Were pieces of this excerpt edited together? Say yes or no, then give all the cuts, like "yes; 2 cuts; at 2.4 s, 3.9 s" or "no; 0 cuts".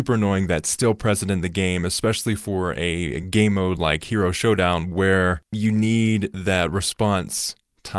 no; 0 cuts